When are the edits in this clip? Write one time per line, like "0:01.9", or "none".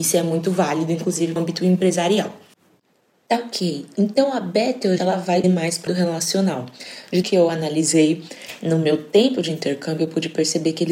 0:01.4
0:05.0
0:05.4
0:05.9
0:07.2